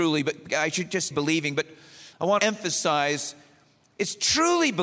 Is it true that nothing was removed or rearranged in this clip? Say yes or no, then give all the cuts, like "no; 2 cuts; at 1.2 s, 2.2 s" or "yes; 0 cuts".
no; 2 cuts; at 1.1 s, 2.4 s